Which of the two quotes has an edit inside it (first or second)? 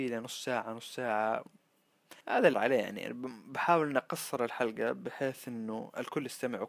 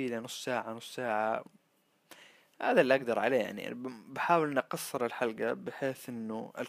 first